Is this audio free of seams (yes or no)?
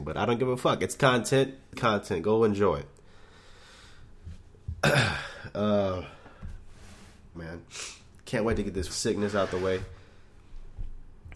no